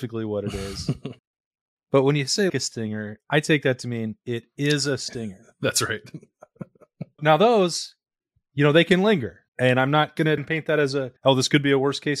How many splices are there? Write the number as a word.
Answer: six